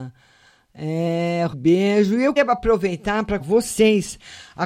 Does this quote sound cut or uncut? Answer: cut